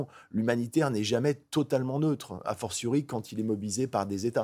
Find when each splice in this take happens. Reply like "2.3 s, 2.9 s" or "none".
none